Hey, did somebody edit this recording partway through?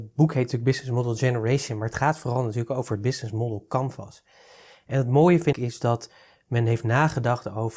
yes; 1 cut; at 5.5 s

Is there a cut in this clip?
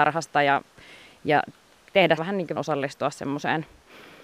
yes; 2 cuts; at 2.2 s, 2.6 s

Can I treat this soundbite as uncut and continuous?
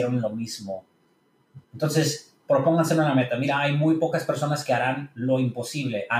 no; 1 cut; at 1.6 s

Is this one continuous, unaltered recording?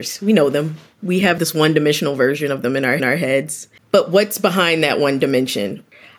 no; 1 cut; at 3.0 s

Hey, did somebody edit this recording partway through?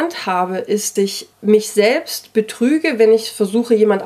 yes; 2 cuts; at 1.0 s, 1.3 s

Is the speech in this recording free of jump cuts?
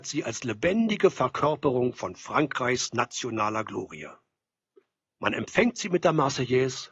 yes; 0 cuts

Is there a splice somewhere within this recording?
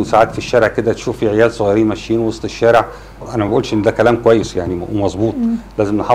no; 0 cuts

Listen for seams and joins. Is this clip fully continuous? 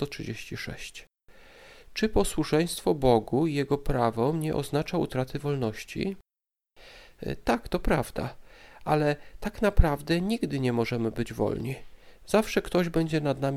yes; 0 cuts

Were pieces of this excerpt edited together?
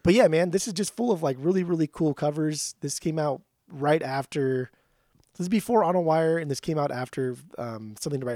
no; 0 cuts

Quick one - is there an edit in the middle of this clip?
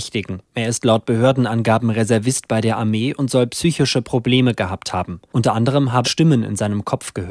yes; 1 cut; at 6.0 s

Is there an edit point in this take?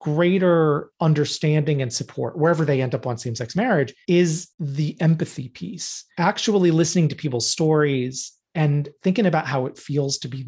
yes; 1 cut; at 0.9 s

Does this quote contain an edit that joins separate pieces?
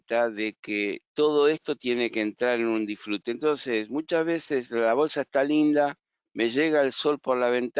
no; 0 cuts

